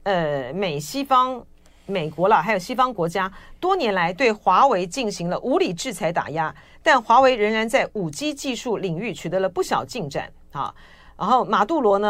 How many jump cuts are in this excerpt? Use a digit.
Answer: 0